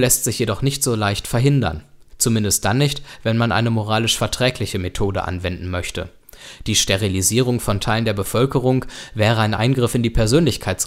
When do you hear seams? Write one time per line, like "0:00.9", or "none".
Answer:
none